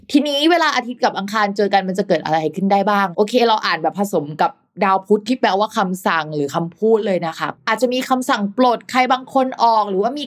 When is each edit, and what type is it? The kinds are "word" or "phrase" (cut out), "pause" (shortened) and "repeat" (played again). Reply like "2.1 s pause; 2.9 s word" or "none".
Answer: none